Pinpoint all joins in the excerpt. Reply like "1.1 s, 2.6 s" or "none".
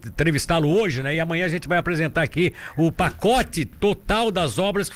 none